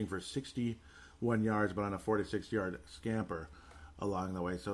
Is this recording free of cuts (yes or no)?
yes